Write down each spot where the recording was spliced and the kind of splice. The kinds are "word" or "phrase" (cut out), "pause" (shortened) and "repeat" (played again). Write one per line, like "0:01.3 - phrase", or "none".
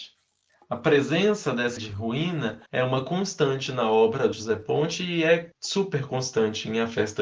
0:01.8 - word
0:02.7 - pause
0:04.3 - word